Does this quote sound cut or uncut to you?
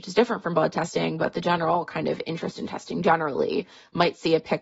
uncut